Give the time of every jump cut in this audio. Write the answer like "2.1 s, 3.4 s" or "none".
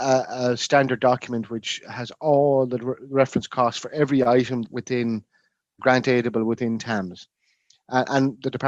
4.6 s, 5.8 s